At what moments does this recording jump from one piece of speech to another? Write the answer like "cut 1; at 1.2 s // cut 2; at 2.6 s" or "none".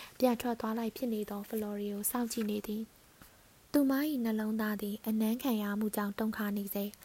none